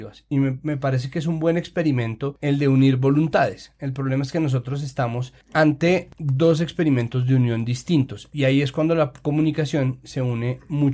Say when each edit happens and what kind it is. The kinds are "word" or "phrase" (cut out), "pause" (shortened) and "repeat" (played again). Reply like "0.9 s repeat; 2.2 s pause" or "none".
none

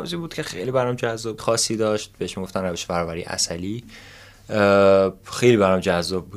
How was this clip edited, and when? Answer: 1.4 s phrase

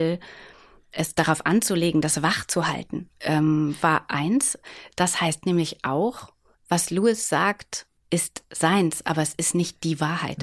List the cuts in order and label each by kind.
6.5 s pause; 8.0 s pause

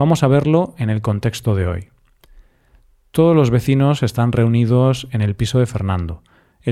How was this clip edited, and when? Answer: none

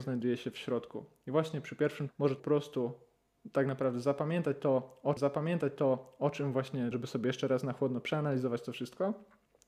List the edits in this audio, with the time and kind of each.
2.1 s word; 2.4 s phrase; 5.2 s repeat; 6.9 s word

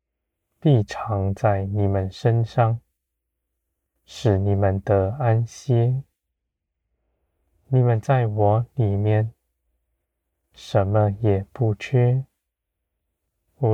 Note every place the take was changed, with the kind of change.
none

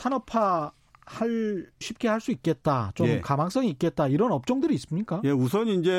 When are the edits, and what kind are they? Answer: 1.8 s word

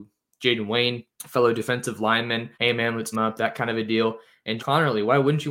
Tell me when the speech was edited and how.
1.1 s pause; 2.5 s pause; 3.1 s word; 4.6 s word

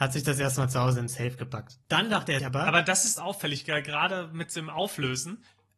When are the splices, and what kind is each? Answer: 1.8 s pause; 2.4 s word; 3.2 s phrase

